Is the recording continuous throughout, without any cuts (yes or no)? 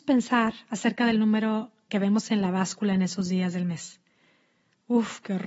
no